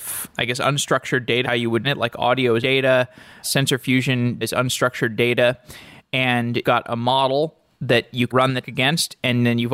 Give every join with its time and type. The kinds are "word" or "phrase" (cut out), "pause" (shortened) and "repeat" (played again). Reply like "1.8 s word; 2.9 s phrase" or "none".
1.4 s word; 1.8 s word; 2.6 s word; 3.4 s word; 4.4 s word; 6.6 s word; 8.3 s word; 8.6 s word